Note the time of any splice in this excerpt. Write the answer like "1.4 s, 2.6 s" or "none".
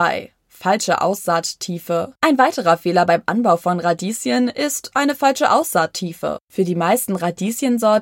2.2 s, 6.4 s

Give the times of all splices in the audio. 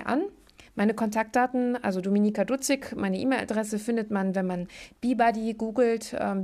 none

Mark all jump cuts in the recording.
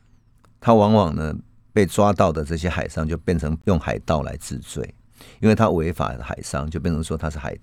none

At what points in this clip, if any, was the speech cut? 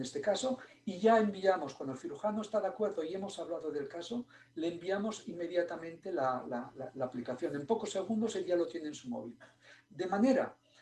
none

